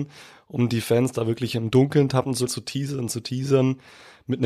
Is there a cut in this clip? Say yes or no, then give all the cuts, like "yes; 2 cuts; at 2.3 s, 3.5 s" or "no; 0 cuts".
yes; 1 cut; at 2.5 s